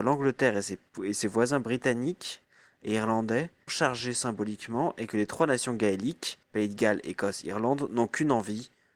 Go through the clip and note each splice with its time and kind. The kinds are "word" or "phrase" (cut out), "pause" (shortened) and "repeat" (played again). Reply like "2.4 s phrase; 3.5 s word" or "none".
3.7 s phrase; 6.4 s pause